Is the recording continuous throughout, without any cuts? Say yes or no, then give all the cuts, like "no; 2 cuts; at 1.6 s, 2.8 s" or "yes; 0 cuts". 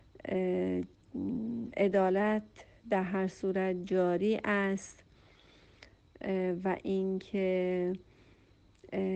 yes; 0 cuts